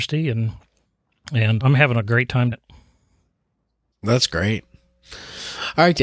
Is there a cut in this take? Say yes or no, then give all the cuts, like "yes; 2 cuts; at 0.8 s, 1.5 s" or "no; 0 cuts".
yes; 2 cuts; at 1.6 s, 2.5 s